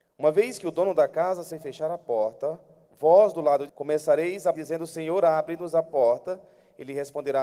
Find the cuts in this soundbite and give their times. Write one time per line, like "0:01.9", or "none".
0:01.5
0:03.7
0:04.5